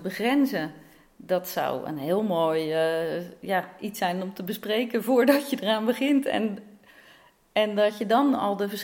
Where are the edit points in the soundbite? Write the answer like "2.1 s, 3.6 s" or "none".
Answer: none